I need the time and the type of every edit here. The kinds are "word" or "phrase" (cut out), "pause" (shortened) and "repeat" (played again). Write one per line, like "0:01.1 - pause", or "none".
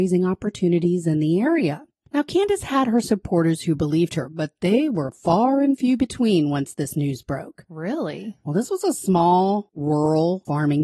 none